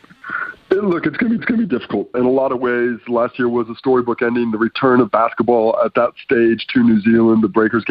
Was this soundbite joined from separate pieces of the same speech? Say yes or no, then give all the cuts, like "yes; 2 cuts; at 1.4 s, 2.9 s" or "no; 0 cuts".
yes; 2 cuts; at 1.4 s, 2.1 s